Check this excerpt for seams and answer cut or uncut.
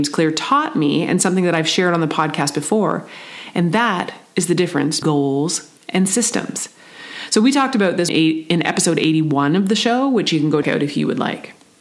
cut